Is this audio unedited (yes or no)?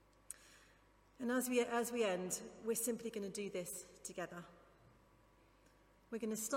yes